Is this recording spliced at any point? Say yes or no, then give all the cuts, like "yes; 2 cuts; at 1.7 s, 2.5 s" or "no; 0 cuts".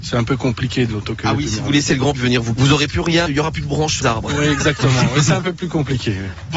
yes; 4 cuts; at 2.1 s, 2.6 s, 3.3 s, 4.0 s